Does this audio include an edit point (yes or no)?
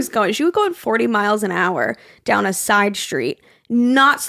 no